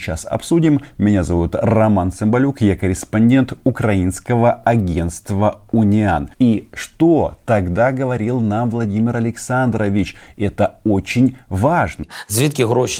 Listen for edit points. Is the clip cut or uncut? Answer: cut